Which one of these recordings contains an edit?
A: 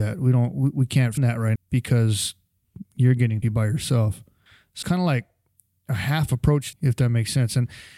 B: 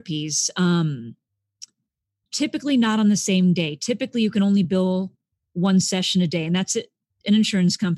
A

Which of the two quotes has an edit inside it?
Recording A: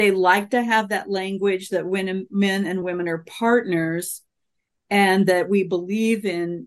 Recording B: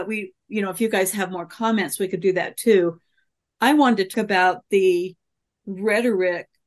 B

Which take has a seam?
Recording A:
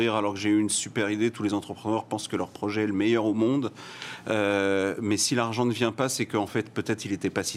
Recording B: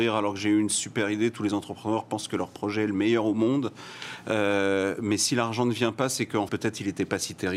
B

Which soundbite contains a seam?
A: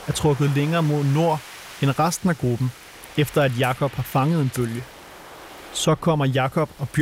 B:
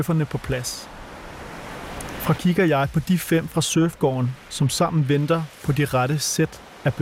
B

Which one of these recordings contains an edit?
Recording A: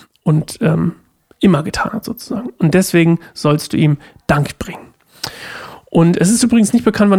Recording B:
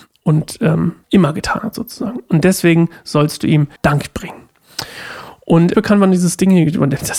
B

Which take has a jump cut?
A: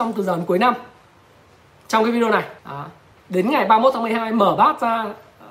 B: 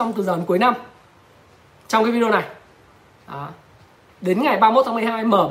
A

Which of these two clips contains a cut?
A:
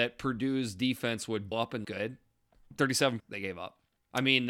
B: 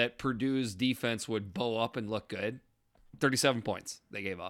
A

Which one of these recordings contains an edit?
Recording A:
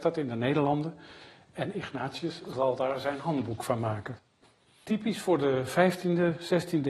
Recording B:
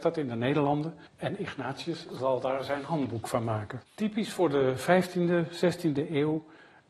B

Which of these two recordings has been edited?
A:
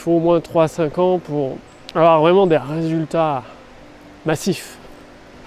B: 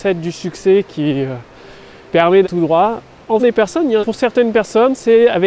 B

